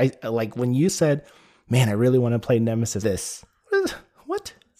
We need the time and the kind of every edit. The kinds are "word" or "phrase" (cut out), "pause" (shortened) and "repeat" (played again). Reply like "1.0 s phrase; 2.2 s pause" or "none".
3.0 s phrase